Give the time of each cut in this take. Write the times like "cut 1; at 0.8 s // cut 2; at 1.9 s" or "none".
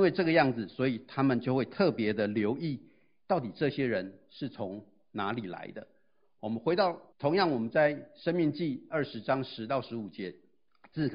cut 1; at 7.1 s